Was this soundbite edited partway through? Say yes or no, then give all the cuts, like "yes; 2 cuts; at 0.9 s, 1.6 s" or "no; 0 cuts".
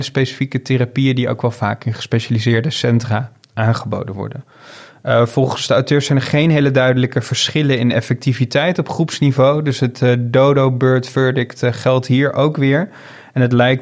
no; 0 cuts